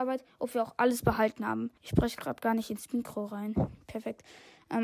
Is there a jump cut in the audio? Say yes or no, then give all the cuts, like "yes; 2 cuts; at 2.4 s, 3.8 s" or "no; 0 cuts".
yes; 1 cut; at 1.8 s